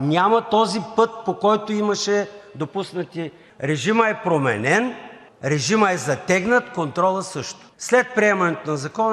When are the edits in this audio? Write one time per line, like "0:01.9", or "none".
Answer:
none